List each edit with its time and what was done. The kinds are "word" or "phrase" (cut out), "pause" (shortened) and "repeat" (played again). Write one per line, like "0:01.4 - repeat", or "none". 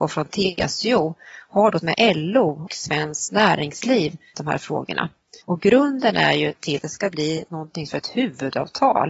0:01.8 - word
0:02.7 - word
0:04.3 - word
0:05.4 - pause
0:06.8 - phrase
0:07.9 - phrase